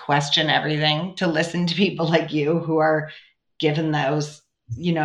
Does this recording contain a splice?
no; 0 cuts

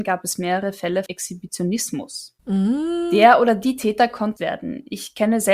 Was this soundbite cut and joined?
yes; 3 cuts; at 1.1 s, 2.4 s, 4.4 s

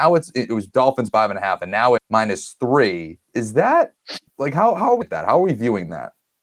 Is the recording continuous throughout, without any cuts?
no; 5 cuts; at 1.1 s, 2.0 s, 3.2 s, 4.3 s, 5.0 s

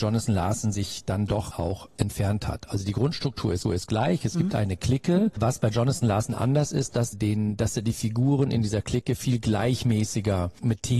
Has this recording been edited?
yes; 3 cuts; at 1.5 s, 3.6 s, 7.1 s

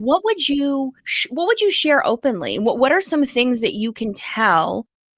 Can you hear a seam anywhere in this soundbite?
yes; 1 cut; at 1.0 s

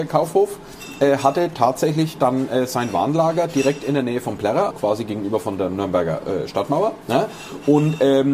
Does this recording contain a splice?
yes; 1 cut; at 4.7 s

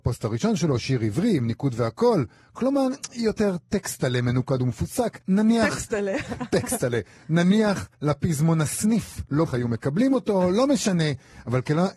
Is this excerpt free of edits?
no; 3 cuts; at 5.2 s, 7.9 s, 9.5 s

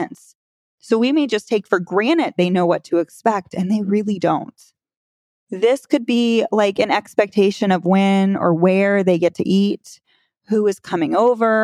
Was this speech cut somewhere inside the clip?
no; 0 cuts

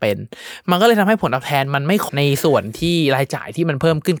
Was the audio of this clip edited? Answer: yes; 1 cut; at 2.1 s

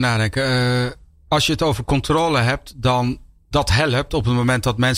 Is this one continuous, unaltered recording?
no; 1 cut; at 3.5 s

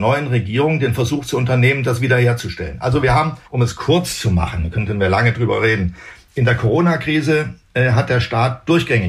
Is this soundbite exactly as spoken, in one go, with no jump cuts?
no; 1 cut; at 3.4 s

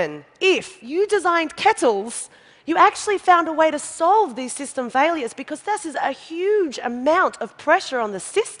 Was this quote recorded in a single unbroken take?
yes; 0 cuts

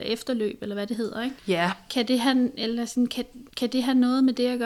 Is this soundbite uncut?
no; 2 cuts; at 1.4 s, 3.5 s

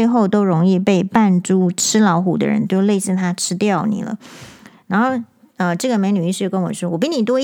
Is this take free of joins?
yes; 0 cuts

